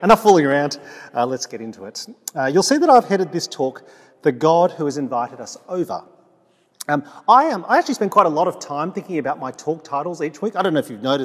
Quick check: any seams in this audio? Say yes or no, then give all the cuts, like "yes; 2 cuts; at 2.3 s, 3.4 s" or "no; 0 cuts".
no; 0 cuts